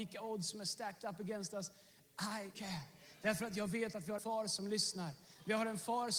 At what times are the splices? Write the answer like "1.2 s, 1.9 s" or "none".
2.5 s, 4.2 s